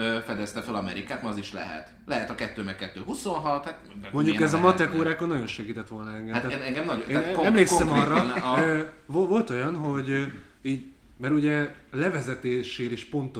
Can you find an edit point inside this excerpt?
no; 0 cuts

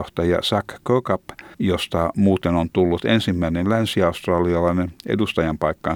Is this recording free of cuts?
no; 1 cut; at 1.5 s

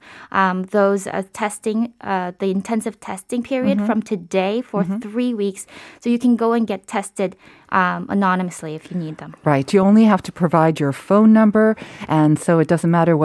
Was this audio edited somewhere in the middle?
no; 0 cuts

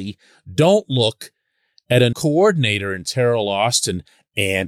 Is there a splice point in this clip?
yes; 1 cut; at 2.1 s

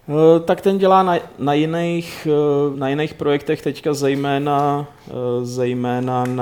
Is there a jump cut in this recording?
yes; 1 cut; at 2.7 s

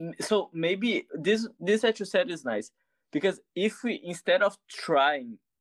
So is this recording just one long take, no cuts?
yes; 0 cuts

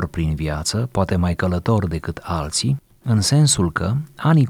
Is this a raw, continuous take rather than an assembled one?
yes; 0 cuts

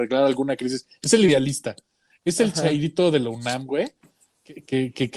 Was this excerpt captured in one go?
yes; 0 cuts

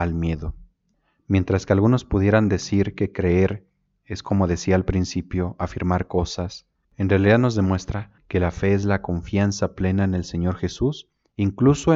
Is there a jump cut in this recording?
yes; 2 cuts; at 6.8 s, 8.2 s

